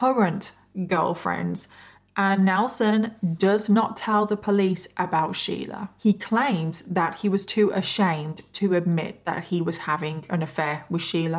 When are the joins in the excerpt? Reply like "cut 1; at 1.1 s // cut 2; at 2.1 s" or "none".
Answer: none